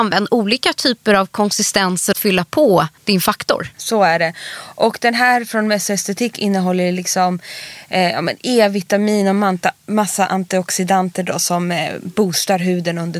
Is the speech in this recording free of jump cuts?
no; 2 cuts; at 2.1 s, 3.0 s

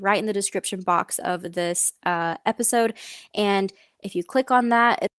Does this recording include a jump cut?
no; 0 cuts

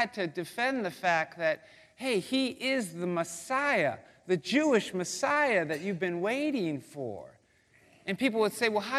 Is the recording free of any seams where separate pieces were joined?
yes; 0 cuts

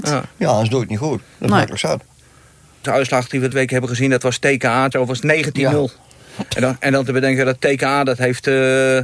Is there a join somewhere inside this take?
yes; 3 cuts; at 2.8 s, 3.5 s, 4.9 s

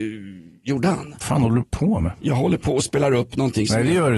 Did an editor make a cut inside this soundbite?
no; 0 cuts

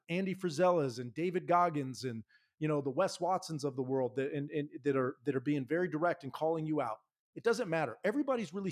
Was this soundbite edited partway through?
no; 0 cuts

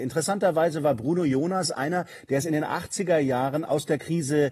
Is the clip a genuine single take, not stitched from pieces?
yes; 0 cuts

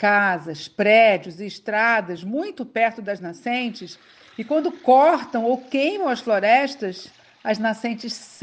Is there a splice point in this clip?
no; 0 cuts

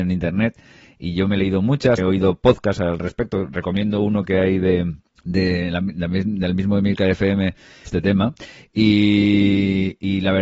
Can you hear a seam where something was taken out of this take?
yes; 3 cuts; at 2.0 s, 5.1 s, 7.9 s

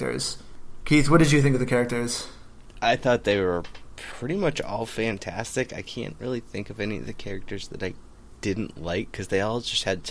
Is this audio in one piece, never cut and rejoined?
yes; 0 cuts

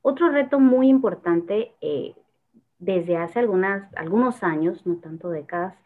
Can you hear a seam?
no; 0 cuts

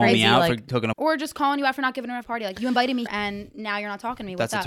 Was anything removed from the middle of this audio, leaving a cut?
yes; 3 cuts; at 0.9 s, 2.2 s, 3.1 s

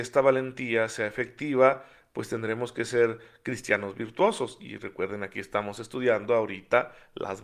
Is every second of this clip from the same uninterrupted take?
yes; 0 cuts

